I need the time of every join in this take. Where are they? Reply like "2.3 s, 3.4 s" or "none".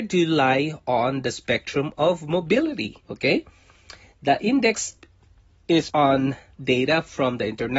3.0 s, 5.9 s